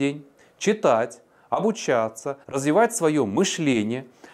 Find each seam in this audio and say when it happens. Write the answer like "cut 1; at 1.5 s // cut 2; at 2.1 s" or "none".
cut 1; at 2.4 s